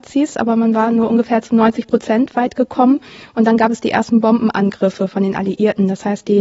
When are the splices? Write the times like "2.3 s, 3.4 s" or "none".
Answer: none